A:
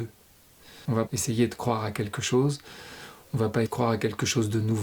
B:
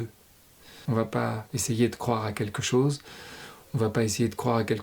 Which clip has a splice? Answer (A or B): A